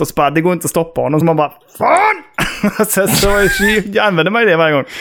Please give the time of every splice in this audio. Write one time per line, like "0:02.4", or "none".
none